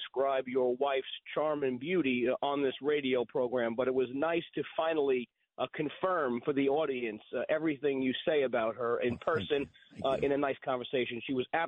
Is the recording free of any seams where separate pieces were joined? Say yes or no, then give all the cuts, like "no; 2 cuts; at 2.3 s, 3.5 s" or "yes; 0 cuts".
yes; 0 cuts